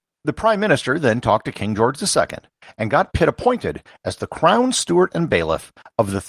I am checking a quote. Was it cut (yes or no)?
no